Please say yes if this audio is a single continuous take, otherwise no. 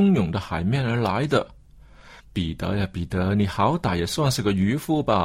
no